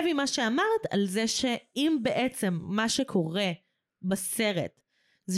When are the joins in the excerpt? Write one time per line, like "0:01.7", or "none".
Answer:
none